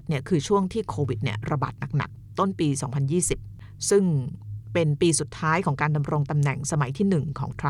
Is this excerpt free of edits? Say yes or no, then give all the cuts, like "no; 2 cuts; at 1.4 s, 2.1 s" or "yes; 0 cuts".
no; 1 cut; at 2.3 s